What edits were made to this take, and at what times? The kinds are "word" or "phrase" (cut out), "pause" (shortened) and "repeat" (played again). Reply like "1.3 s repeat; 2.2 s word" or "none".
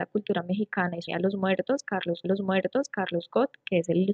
1.1 s word; 2.2 s repeat